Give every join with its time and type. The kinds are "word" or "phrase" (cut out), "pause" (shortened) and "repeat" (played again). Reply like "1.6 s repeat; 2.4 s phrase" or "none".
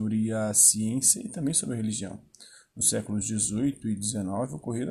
none

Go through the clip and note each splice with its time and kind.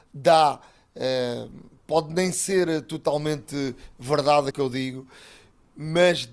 4.5 s word

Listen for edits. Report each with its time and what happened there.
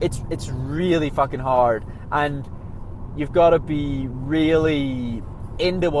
none

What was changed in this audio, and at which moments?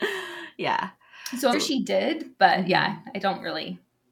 1.5 s word

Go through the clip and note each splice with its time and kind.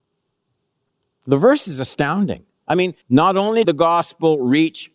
3.0 s pause; 3.6 s word

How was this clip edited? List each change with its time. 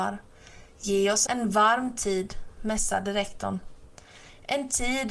1.3 s phrase

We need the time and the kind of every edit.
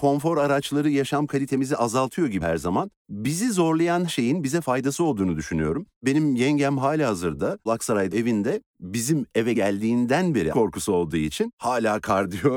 2.4 s word; 4.1 s word; 7.7 s word; 8.1 s word; 9.5 s word; 10.5 s word

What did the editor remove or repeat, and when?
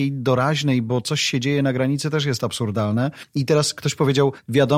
none

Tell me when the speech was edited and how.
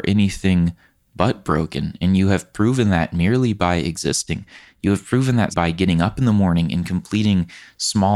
5.5 s word

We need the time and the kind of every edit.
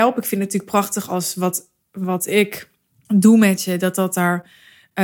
none

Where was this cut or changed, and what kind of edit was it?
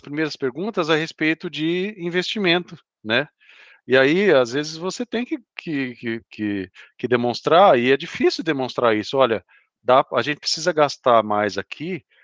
none

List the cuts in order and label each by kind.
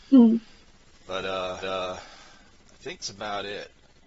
1.6 s repeat; 3.0 s word

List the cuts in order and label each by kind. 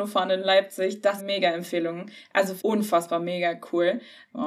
1.2 s phrase; 2.6 s word

